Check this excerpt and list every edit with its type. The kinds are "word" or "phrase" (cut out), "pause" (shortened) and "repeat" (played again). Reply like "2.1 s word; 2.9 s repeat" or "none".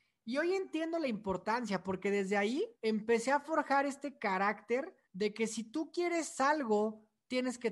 2.7 s pause; 5.0 s pause